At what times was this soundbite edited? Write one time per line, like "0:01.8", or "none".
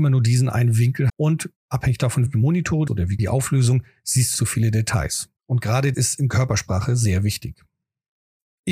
0:01.1
0:01.6
0:02.3
0:02.9
0:03.2
0:04.3
0:05.4
0:05.9